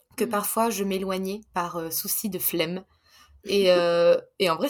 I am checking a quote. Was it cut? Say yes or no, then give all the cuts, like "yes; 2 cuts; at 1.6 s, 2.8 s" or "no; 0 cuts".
no; 0 cuts